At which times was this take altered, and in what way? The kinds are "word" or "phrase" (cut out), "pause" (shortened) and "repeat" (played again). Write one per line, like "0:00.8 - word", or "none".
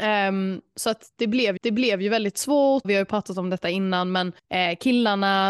0:01.6 - repeat
0:02.8 - word
0:04.4 - pause